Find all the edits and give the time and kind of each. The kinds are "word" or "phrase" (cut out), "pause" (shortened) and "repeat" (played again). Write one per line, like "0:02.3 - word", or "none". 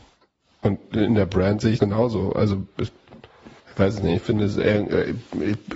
0:01.8 - word
0:03.6 - pause